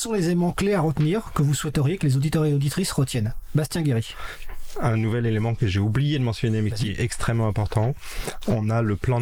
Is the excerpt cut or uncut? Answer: uncut